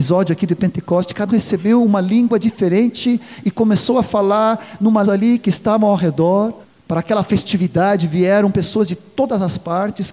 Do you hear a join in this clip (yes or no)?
yes